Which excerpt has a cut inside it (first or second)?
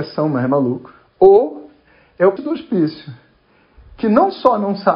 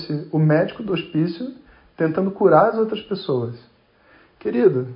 first